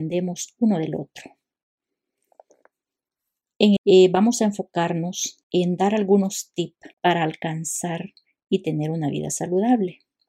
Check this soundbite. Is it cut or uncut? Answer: cut